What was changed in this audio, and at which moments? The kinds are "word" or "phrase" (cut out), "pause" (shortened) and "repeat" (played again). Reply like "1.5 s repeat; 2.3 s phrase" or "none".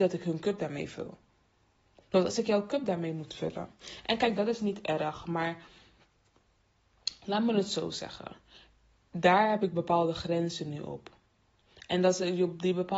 none

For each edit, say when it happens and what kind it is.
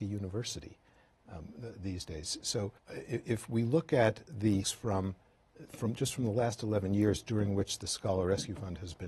2.8 s pause; 4.6 s word; 5.7 s word

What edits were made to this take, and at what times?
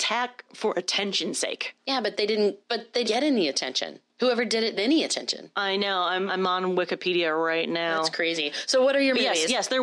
1.8 s pause; 2.6 s pause; 3.0 s word; 4.1 s pause; 4.8 s phrase; 6.3 s word

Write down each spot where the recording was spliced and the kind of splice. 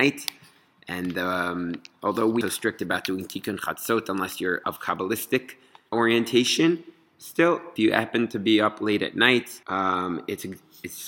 2.4 s phrase; 4.6 s word; 5.9 s word; 7.8 s word; 9.6 s pause

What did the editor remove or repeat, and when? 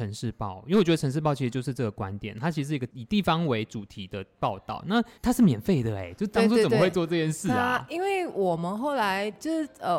5.2 s pause

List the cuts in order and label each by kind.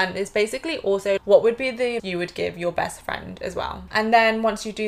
2.0 s word

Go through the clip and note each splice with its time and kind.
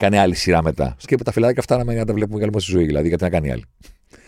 1.0 s word

